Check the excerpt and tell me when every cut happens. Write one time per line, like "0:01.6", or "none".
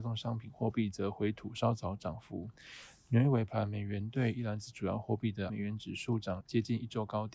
0:05.5
0:06.4